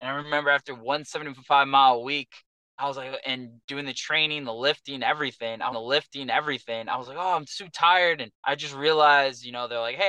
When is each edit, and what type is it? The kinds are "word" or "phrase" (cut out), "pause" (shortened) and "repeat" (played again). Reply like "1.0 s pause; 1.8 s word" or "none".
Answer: 5.7 s repeat; 8.4 s pause

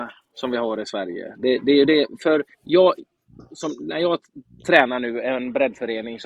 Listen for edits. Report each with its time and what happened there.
2.5 s pause

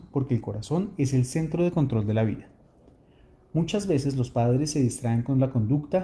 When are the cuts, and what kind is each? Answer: none

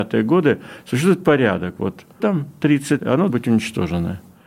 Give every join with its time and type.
2.2 s word; 3.0 s word; 3.3 s word

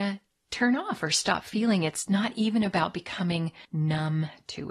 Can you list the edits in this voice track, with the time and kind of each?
3.6 s pause

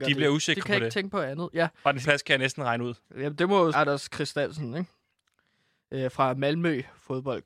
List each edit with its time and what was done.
2.0 s word; 3.0 s pause; 3.7 s phrase

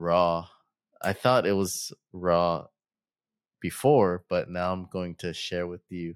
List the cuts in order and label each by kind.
none

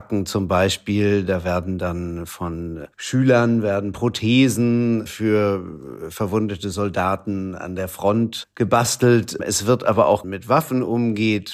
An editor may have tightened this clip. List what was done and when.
2.9 s pause; 10.2 s phrase

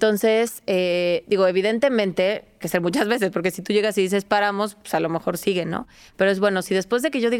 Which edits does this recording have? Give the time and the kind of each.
2.6 s word

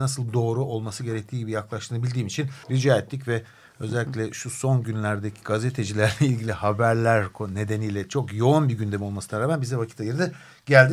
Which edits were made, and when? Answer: 2.6 s pause

